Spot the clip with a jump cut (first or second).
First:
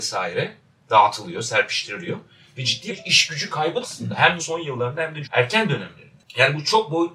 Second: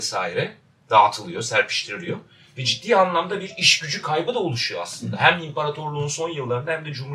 first